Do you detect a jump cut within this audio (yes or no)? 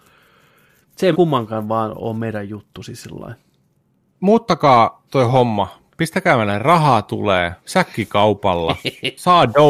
yes